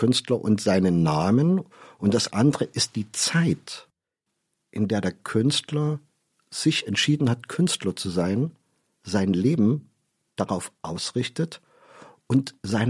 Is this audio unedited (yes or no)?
yes